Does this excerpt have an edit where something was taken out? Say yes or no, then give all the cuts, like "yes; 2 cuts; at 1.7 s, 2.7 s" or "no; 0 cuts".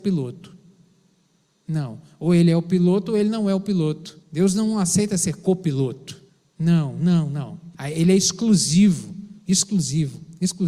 yes; 4 cuts; at 4.2 s, 6.3 s, 7.7 s, 9.4 s